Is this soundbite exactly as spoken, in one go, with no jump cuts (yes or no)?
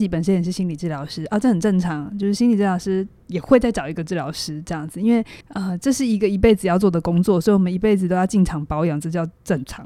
no